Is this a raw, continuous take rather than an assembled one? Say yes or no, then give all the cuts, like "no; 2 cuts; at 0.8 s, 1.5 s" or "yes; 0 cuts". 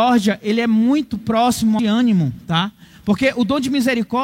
no; 1 cut; at 1.8 s